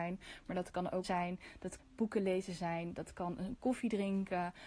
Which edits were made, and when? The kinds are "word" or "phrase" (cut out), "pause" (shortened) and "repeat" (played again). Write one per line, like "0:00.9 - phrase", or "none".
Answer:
0:01.0 - word
0:01.8 - word
0:03.6 - word